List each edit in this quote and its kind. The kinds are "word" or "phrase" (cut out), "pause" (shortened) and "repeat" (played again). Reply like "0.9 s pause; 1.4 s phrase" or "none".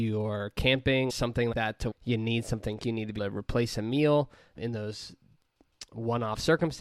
1.1 s word; 1.5 s word; 1.9 s word; 2.8 s word; 3.2 s word; 4.6 s word